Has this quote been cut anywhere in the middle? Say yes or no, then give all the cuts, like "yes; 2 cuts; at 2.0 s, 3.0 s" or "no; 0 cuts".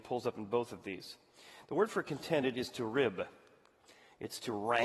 no; 0 cuts